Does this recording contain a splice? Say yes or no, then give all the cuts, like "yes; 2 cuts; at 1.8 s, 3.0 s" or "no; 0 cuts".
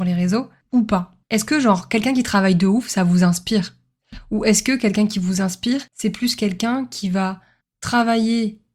yes; 2 cuts; at 1.2 s, 5.9 s